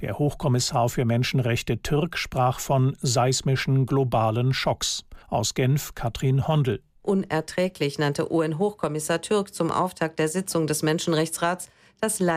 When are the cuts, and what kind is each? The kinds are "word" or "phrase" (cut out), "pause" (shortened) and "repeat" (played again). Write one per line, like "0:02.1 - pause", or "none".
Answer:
0:05.2 - pause
0:06.9 - pause